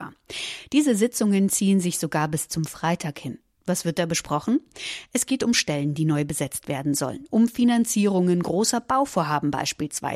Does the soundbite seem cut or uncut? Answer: uncut